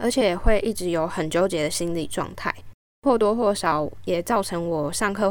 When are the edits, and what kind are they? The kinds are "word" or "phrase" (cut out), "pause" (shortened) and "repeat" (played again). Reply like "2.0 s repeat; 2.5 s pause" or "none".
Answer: none

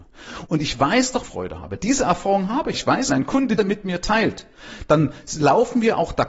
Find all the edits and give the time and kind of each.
1.2 s phrase; 2.7 s phrase; 3.1 s phrase; 3.6 s phrase

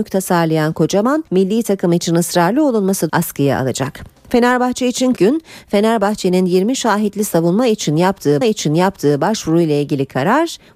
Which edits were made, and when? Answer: 1.3 s pause; 3.1 s phrase; 5.2 s word; 8.4 s repeat

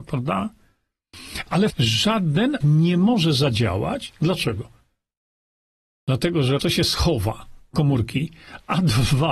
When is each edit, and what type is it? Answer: 1.7 s word; 2.6 s word; 6.6 s word; 7.7 s word

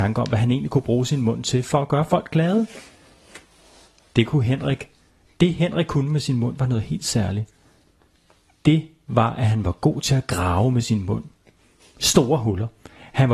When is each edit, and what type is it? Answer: none

